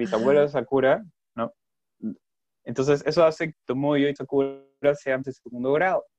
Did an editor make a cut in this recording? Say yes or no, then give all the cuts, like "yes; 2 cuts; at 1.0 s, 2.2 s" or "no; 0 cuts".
yes; 3 cuts; at 3.5 s, 4.2 s, 5.2 s